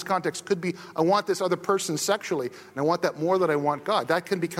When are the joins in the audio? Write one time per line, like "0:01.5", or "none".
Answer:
none